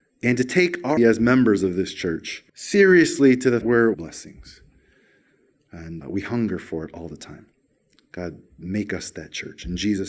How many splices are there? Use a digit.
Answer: 5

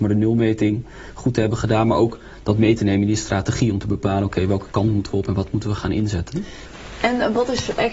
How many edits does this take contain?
0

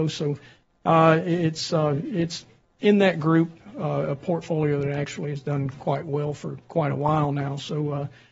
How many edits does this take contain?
0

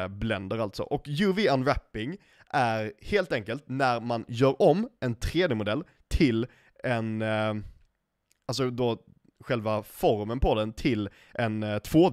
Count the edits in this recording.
0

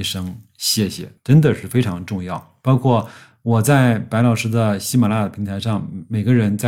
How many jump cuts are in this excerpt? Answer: 0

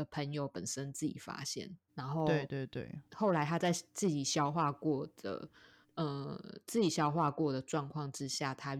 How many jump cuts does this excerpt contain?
3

